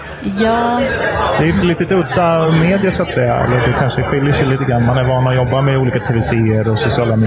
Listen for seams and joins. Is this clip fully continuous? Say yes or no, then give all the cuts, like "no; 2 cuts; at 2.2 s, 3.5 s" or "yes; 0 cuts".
yes; 0 cuts